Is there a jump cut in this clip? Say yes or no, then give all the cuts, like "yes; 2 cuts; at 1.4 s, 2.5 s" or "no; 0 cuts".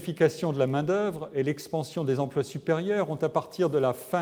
no; 0 cuts